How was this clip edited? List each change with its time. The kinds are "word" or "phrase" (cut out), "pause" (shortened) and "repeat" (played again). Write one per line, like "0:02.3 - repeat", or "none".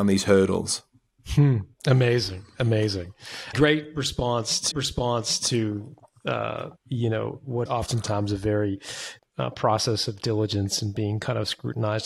0:01.7 - pause
0:03.5 - word
0:04.7 - repeat
0:06.8 - pause
0:07.7 - word
0:09.2 - word

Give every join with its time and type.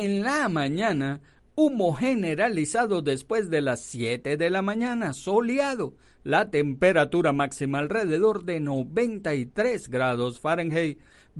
none

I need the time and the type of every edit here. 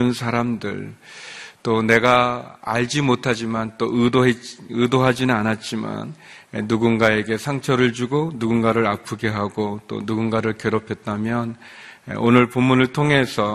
none

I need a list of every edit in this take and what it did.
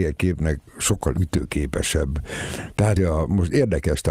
0:03.0 - word

